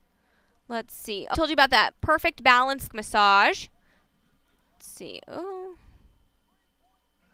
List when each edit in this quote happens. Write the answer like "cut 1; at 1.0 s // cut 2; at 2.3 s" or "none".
cut 1; at 1.3 s // cut 2; at 1.9 s // cut 3; at 2.9 s // cut 4; at 4.8 s